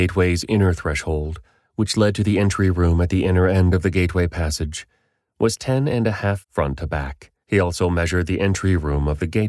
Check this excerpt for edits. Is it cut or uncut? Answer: cut